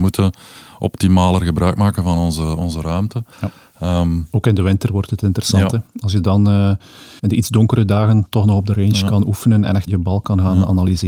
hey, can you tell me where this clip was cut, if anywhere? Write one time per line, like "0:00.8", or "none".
0:03.3
0:07.2
0:09.9